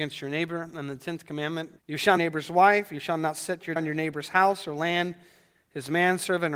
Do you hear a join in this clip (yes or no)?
yes